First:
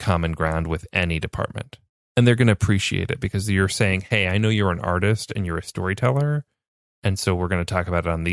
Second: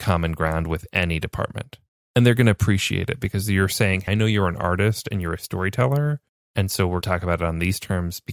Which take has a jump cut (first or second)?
second